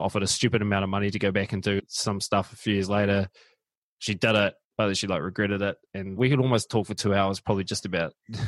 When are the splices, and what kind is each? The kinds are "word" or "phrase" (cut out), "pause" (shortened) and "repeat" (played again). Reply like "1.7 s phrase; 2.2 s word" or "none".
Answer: none

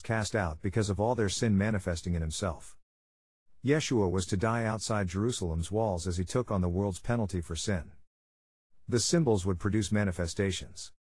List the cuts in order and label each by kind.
none

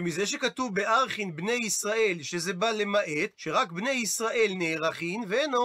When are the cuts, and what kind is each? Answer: 3.3 s pause

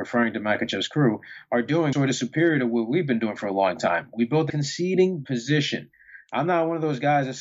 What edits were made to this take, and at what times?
1.9 s word; 4.5 s phrase; 5.2 s word

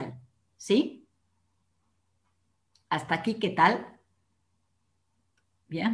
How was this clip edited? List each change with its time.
none

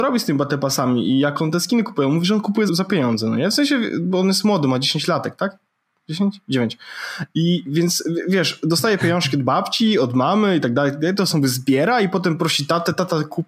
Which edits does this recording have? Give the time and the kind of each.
2.7 s word

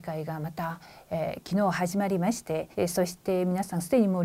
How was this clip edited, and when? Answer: 2.7 s pause

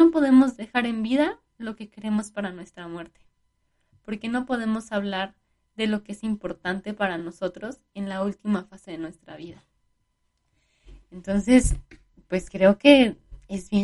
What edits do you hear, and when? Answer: none

